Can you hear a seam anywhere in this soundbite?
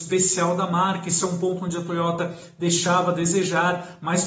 no; 0 cuts

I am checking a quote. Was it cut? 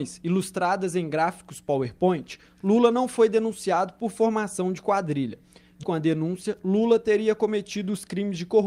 yes; 1 cut; at 5.8 s

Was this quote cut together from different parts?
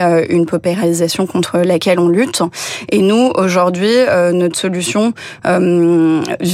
no; 0 cuts

